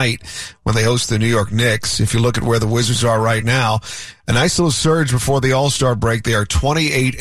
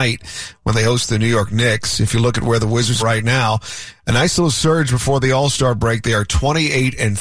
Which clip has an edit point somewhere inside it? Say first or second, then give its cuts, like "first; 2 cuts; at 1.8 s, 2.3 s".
second; 1 cut; at 3.0 s